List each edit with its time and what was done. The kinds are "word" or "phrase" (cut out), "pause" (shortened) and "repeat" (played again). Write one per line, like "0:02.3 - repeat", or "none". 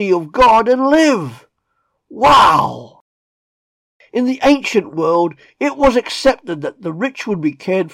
none

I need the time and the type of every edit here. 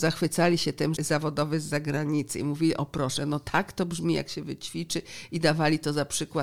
0:01.0 - phrase

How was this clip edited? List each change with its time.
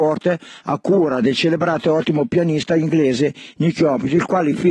none

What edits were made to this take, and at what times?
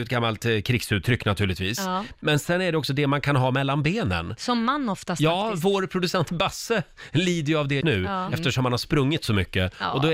0:07.8 - word

